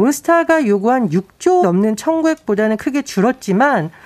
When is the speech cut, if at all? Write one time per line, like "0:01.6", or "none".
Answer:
0:01.6